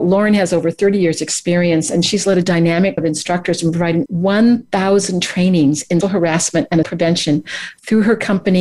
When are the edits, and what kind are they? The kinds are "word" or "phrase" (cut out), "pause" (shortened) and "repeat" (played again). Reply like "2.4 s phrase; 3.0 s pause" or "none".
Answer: 3.0 s word; 4.1 s word; 6.0 s word; 6.8 s word